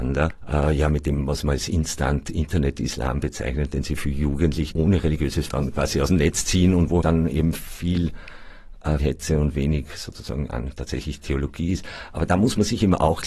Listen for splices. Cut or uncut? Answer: cut